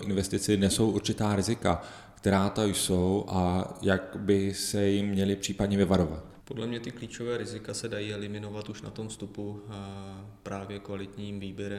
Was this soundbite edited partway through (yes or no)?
no